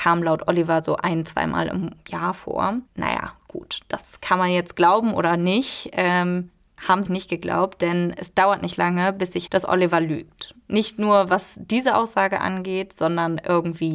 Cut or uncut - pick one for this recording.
cut